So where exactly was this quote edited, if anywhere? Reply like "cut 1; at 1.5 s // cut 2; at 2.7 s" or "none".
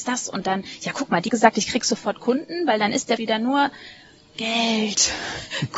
cut 1; at 1.3 s // cut 2; at 3.2 s